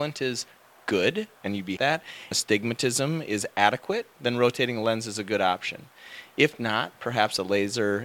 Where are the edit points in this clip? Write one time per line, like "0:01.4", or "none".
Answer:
0:01.4
0:01.8
0:02.3